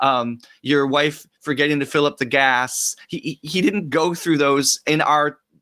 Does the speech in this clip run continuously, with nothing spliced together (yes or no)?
yes